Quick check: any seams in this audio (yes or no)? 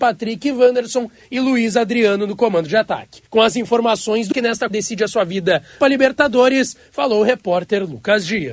yes